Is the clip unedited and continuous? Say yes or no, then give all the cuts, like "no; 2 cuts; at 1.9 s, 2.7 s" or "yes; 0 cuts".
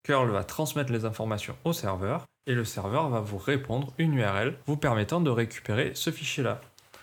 yes; 0 cuts